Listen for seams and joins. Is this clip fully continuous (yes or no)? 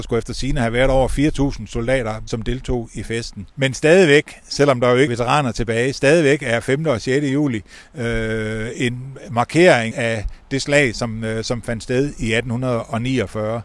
no